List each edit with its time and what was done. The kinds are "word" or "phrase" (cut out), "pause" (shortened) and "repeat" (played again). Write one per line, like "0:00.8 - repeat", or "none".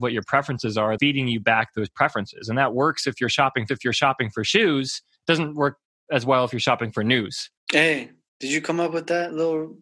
0:01.0 - phrase
0:03.7 - repeat
0:07.6 - pause